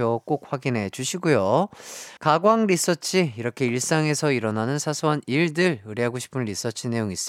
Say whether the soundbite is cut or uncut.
cut